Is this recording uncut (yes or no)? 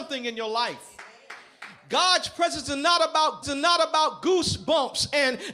no